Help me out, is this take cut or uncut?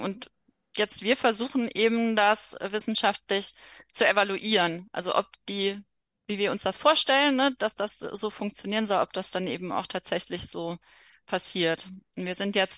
uncut